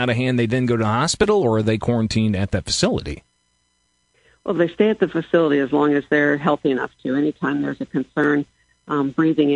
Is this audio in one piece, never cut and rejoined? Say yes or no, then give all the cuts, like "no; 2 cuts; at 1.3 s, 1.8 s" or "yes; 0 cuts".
yes; 0 cuts